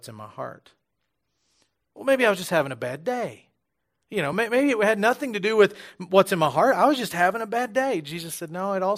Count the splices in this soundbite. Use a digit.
0